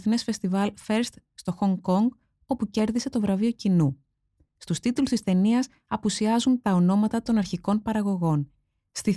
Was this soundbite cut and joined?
no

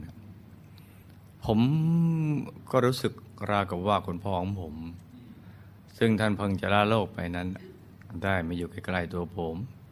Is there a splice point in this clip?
no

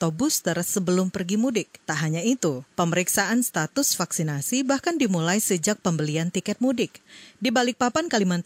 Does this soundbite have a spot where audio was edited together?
yes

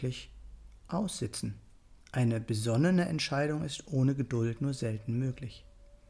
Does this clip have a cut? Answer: yes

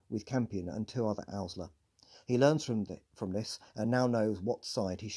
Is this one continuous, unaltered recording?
yes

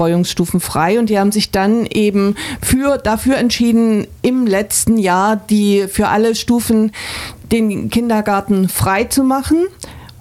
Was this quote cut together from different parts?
no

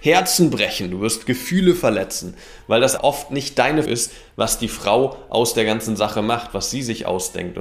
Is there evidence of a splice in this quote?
yes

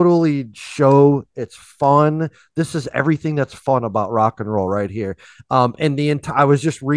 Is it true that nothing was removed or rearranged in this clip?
yes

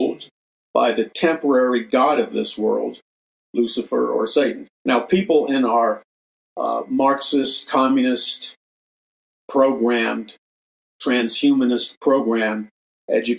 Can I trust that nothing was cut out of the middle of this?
yes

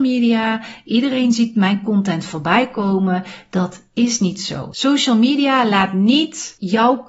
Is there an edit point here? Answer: no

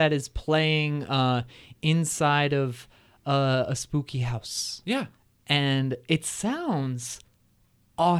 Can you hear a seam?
no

